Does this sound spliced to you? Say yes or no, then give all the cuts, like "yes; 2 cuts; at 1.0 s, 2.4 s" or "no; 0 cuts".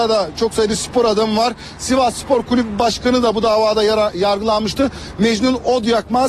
no; 0 cuts